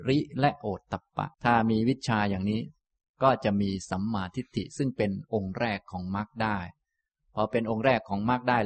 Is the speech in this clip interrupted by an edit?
yes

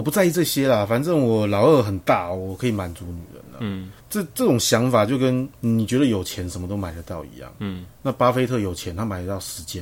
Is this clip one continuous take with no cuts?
no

